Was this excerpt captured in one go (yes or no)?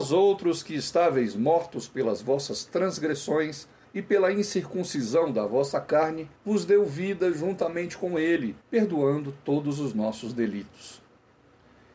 no